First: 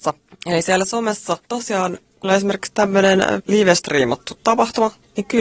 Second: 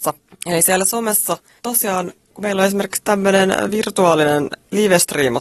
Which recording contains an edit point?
first; 3 cuts; at 1.4 s, 2.2 s, 3.4 s

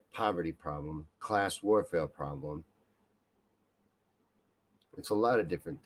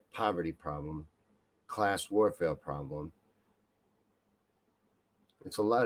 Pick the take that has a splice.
first; 1 cut; at 1.1 s

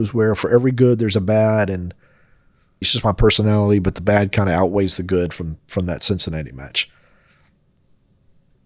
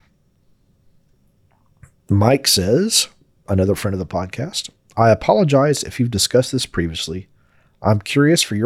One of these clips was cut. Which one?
first; 1 cut; at 2.8 s

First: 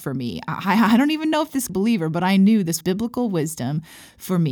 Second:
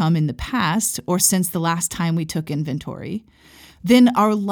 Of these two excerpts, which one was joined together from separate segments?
first; 2 cuts; at 1.7 s, 2.8 s

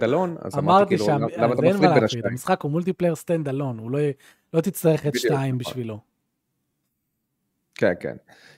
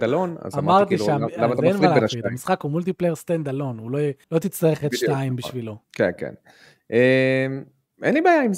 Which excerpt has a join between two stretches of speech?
second; 2 cuts; at 4.2 s, 5.8 s

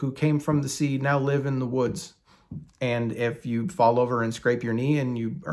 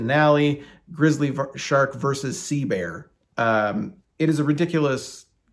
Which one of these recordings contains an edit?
second; 1 cut; at 4.0 s

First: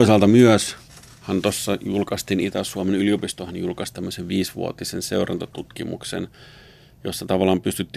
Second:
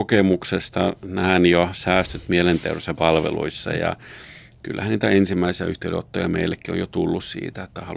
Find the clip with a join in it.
second; 1 cut; at 2.9 s

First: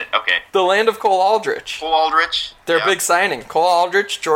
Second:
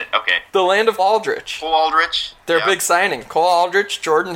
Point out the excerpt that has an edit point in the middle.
second; 1 cut; at 1.0 s

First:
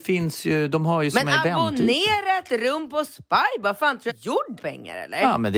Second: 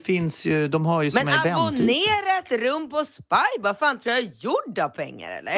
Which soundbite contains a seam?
first; 2 cuts; at 4.1 s, 4.6 s

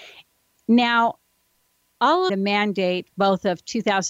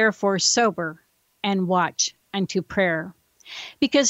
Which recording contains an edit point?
first; 1 cut; at 2.3 s

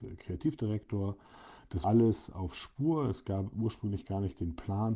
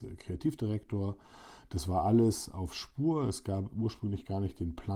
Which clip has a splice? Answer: first; 1 cut; at 1.8 s

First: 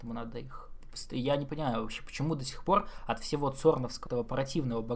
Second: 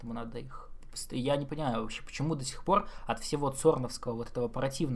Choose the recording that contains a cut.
first; 1 cut; at 4.1 s

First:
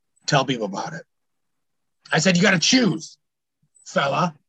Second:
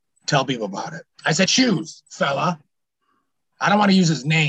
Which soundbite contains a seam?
second; 3 cuts; at 1.1 s, 1.5 s, 2.1 s

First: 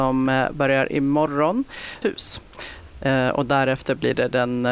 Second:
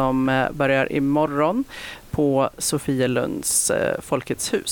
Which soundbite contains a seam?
first; 1 cut; at 2.0 s

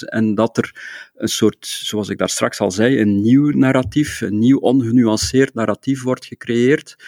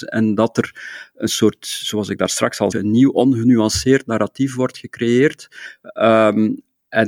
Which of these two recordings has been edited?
second; 1 cut; at 2.7 s

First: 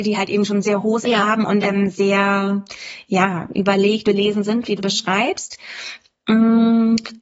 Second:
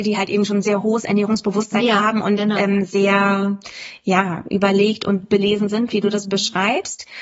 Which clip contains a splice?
first; 4 cuts; at 1.0 s, 1.6 s, 4.0 s, 4.8 s

